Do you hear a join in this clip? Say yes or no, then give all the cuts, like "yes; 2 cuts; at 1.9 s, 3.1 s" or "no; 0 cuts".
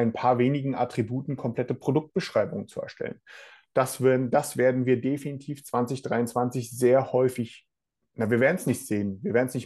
no; 0 cuts